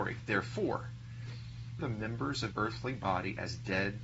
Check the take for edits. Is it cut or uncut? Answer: cut